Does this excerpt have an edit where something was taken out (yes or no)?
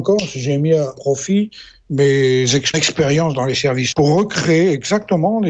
yes